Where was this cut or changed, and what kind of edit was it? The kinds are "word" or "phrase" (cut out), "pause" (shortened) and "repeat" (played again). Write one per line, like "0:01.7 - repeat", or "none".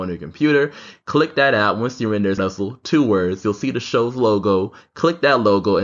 0:02.4 - phrase